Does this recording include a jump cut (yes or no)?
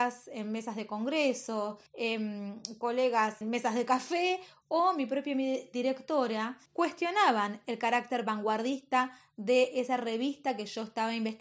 yes